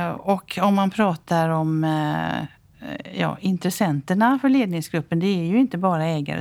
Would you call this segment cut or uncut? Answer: uncut